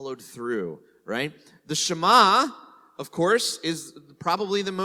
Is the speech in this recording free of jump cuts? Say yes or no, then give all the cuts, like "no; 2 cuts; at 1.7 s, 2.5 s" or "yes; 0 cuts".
yes; 0 cuts